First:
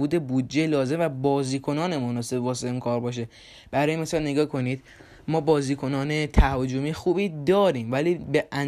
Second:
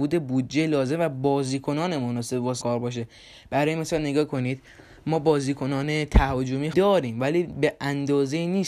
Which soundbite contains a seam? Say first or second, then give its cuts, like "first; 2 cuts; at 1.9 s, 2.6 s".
second; 2 cuts; at 2.6 s, 6.7 s